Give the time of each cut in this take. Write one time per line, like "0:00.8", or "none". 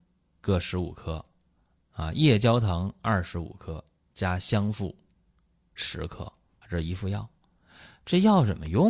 0:06.6